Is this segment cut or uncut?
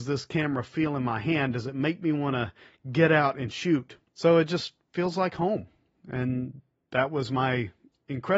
uncut